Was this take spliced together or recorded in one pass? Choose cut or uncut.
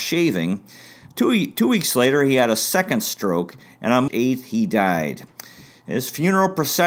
cut